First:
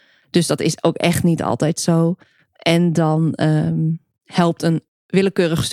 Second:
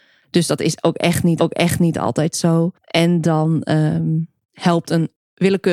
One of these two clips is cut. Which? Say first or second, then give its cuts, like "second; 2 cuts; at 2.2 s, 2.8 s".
second; 2 cuts; at 1.4 s, 2.7 s